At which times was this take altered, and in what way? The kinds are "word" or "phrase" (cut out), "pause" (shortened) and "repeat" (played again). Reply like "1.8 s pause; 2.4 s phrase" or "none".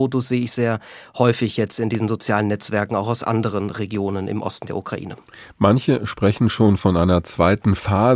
none